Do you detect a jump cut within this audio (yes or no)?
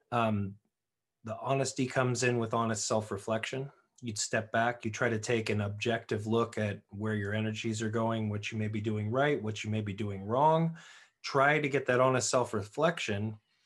no